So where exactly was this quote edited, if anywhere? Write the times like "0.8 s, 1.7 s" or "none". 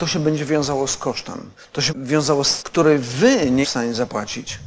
1.6 s, 1.9 s, 2.6 s, 3.6 s